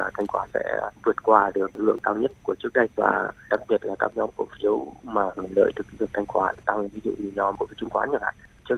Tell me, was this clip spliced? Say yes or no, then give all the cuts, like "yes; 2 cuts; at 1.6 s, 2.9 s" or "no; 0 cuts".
yes; 1 cut; at 2.9 s